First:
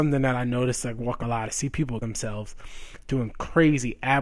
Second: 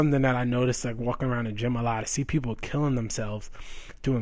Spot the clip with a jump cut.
first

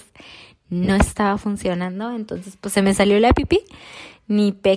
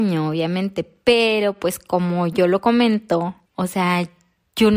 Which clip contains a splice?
second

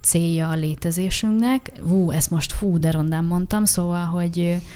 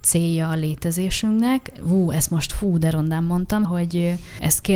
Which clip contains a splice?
second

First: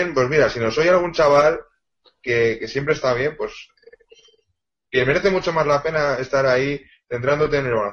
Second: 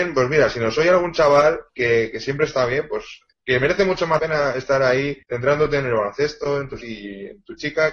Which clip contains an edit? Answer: second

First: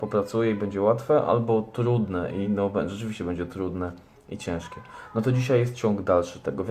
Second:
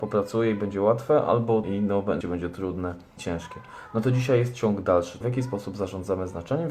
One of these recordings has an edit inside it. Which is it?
second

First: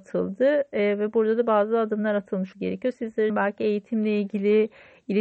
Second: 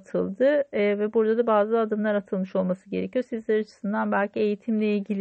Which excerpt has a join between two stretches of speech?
first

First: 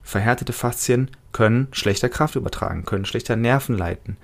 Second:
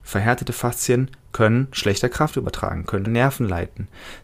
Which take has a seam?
second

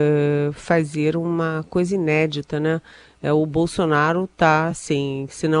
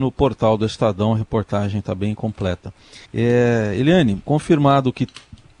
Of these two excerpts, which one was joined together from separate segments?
second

